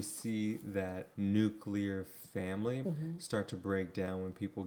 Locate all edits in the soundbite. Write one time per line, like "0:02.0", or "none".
0:01.1
0:02.8